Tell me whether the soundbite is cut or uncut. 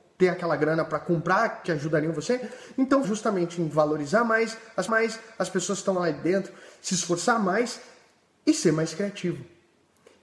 cut